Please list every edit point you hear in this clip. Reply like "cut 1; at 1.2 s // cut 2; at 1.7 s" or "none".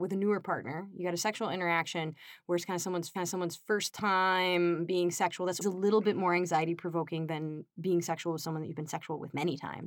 cut 1; at 3.1 s // cut 2; at 5.6 s